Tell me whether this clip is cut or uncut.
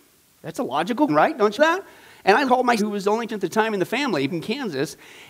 cut